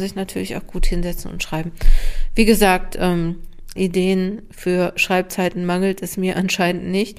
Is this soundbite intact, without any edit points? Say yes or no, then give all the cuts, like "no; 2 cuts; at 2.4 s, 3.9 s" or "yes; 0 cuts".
no; 1 cut; at 3.8 s